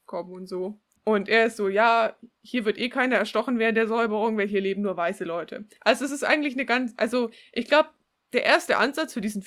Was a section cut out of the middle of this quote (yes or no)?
no